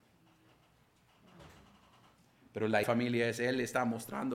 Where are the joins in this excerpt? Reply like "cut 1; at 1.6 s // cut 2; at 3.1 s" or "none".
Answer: cut 1; at 2.8 s